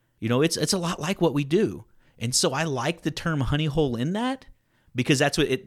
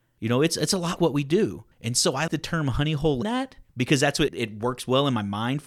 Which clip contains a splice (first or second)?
second